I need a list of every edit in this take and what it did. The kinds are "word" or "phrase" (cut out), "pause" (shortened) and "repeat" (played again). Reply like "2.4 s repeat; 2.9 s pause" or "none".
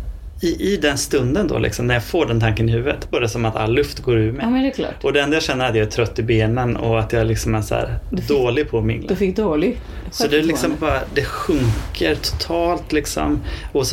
3.1 s word